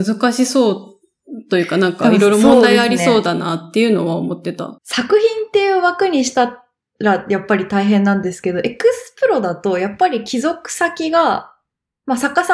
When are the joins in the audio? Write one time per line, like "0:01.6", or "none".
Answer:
0:04.8